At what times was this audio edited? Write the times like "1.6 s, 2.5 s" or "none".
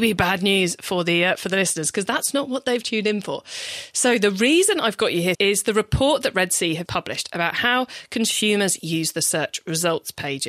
5.3 s, 6.9 s